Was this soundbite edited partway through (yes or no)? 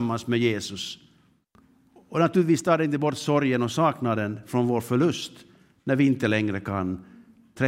no